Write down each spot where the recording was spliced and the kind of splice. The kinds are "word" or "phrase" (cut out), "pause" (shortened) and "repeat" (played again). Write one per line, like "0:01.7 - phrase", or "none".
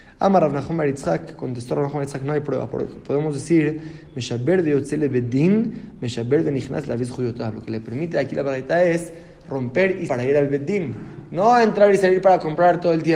0:10.1 - word